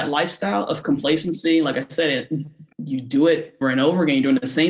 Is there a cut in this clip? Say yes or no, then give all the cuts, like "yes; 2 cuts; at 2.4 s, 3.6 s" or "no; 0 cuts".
yes; 2 cuts; at 2.7 s, 3.6 s